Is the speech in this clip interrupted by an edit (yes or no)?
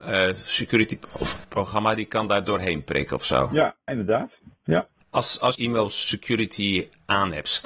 yes